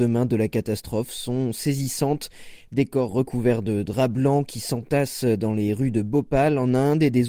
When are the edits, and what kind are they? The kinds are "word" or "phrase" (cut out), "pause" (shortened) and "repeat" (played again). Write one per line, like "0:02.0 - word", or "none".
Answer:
none